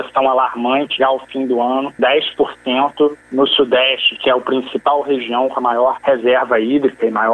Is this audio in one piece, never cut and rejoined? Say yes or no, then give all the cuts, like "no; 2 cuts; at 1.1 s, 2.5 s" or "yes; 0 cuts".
no; 2 cuts; at 1.0 s, 2.0 s